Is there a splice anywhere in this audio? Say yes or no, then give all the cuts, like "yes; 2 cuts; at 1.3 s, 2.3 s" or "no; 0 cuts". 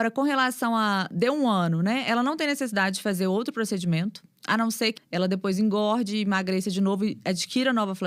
yes; 1 cut; at 5.0 s